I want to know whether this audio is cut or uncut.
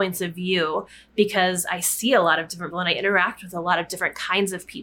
cut